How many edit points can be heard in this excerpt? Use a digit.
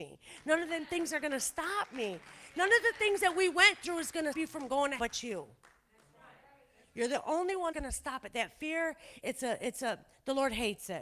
4